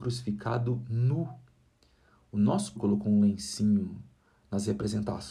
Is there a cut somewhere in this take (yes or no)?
yes